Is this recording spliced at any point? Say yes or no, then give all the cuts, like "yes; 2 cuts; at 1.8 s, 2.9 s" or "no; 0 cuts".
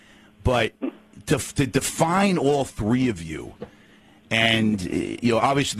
no; 0 cuts